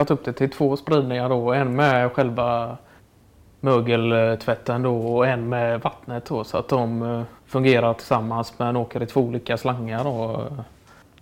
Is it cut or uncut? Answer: cut